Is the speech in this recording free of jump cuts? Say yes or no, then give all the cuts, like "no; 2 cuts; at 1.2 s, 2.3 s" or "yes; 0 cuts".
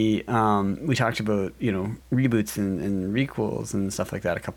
no; 1 cut; at 2.0 s